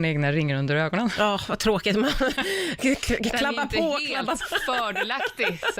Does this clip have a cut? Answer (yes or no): yes